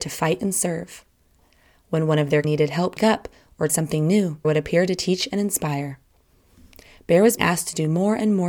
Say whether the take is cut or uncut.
cut